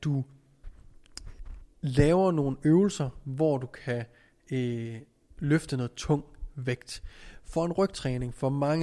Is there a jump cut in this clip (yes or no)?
no